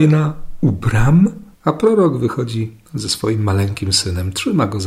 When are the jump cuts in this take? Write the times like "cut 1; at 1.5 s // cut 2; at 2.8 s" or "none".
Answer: cut 1; at 1.5 s // cut 2; at 2.9 s